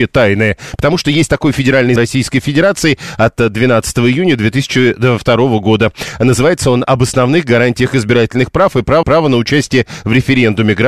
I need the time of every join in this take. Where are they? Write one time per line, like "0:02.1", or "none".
0:02.0
0:09.0